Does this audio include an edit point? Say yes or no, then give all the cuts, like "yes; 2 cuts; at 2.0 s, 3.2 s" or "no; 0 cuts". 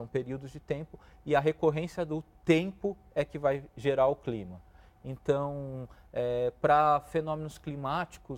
no; 0 cuts